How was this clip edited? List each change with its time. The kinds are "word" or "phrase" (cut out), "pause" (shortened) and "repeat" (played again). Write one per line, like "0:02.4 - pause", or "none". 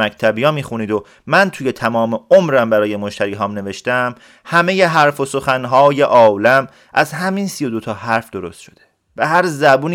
none